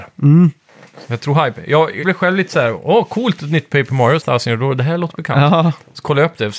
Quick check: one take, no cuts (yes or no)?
no